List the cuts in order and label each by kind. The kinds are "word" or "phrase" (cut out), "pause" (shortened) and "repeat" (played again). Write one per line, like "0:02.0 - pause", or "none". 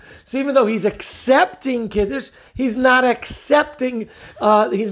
none